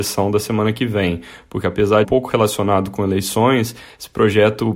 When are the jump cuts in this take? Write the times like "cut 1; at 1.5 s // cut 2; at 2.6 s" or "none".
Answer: cut 1; at 2.0 s